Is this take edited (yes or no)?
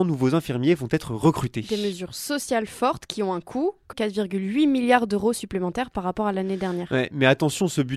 yes